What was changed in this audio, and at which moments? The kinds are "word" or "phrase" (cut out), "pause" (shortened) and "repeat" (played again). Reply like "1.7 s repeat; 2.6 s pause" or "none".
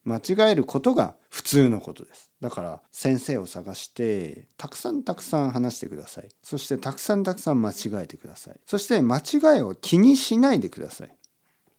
1.2 s pause; 2.4 s pause; 2.9 s pause; 6.4 s pause; 8.6 s pause